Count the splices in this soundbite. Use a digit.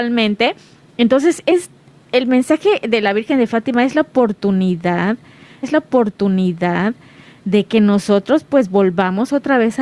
1